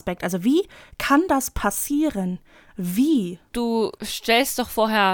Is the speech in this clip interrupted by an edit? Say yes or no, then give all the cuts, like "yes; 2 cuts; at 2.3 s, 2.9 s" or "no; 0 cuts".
no; 0 cuts